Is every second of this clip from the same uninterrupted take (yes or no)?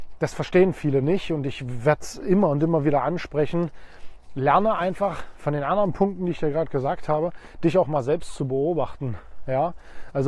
yes